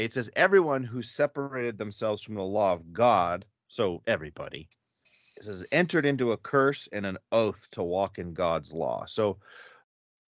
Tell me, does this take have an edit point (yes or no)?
no